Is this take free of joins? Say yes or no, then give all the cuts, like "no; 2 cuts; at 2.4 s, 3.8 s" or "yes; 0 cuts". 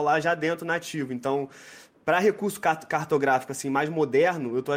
yes; 0 cuts